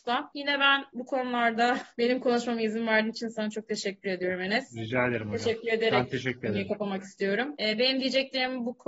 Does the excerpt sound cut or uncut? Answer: uncut